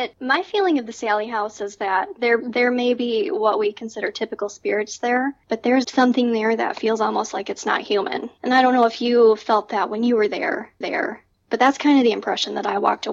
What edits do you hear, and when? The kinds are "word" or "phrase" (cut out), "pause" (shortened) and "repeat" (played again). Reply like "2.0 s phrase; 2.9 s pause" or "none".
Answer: 5.8 s word; 10.8 s repeat